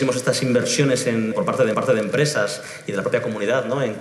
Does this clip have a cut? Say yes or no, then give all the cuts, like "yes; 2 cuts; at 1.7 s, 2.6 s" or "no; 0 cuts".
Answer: yes; 2 cuts; at 1.3 s, 1.7 s